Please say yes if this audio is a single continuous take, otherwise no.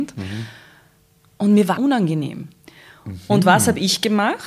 no